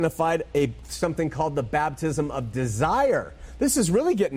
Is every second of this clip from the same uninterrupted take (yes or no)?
yes